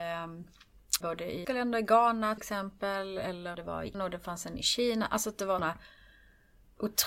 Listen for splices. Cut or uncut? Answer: cut